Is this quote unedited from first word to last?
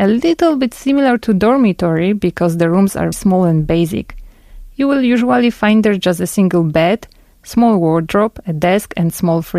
no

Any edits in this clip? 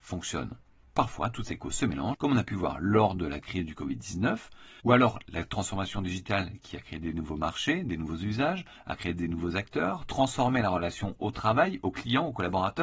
no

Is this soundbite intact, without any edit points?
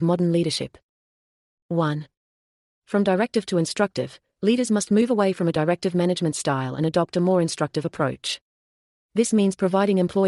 yes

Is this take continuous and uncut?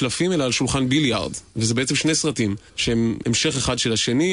no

